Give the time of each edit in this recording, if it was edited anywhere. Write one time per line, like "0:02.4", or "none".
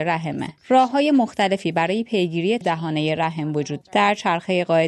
0:02.6
0:03.8